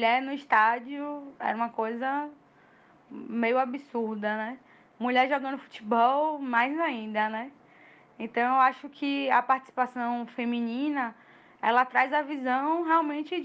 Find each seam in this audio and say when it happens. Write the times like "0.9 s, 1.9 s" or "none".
none